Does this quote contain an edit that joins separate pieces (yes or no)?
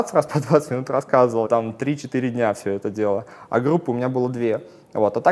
yes